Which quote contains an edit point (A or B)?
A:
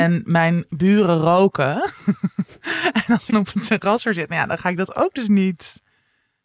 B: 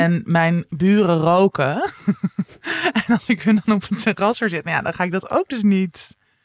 A